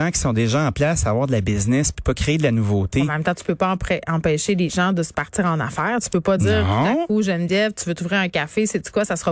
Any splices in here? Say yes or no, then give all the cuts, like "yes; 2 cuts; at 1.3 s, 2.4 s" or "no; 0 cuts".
no; 0 cuts